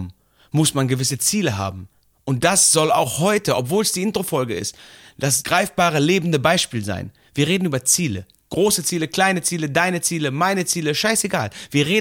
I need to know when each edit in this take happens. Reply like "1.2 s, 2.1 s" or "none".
none